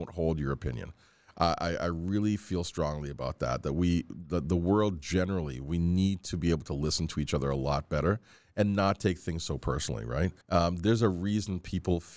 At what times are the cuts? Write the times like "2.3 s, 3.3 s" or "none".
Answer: 10.4 s